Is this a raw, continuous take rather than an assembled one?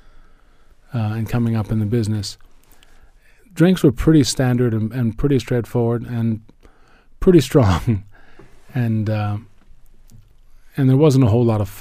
yes; 0 cuts

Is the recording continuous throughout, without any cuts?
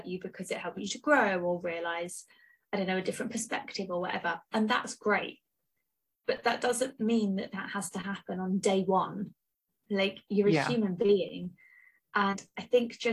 yes; 0 cuts

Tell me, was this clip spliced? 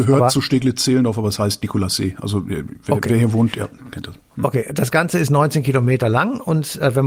no; 0 cuts

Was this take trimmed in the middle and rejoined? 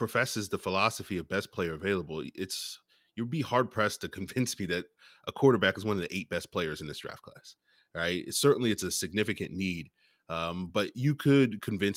no; 0 cuts

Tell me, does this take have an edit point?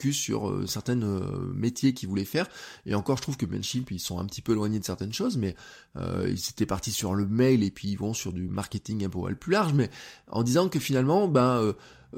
no; 0 cuts

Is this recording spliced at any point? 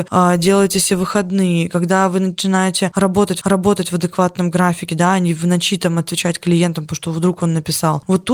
yes; 1 cut; at 3.4 s

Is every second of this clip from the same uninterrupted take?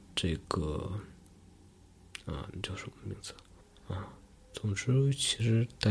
no; 1 cut; at 3.6 s

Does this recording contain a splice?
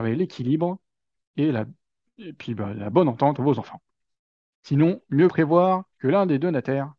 yes; 3 cuts; at 3.4 s, 5.3 s, 5.9 s

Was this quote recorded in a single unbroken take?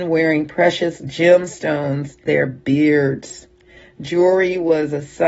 no; 1 cut; at 2.3 s

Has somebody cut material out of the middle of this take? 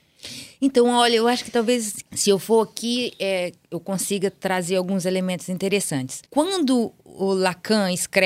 yes; 2 cuts; at 2.1 s, 6.2 s

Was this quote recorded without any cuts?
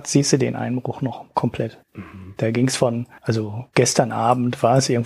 no; 2 cuts; at 1.8 s, 3.2 s

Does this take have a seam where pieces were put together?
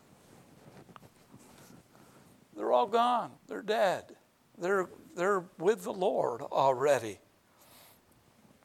yes; 2 cuts; at 3.4 s, 4.4 s

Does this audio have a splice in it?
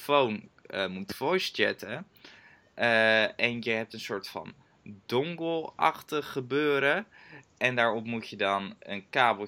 no; 0 cuts

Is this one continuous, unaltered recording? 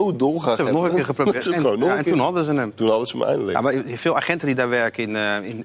yes; 0 cuts

